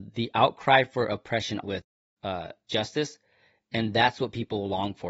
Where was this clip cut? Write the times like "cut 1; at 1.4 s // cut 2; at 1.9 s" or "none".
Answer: cut 1; at 1.6 s // cut 2; at 2.7 s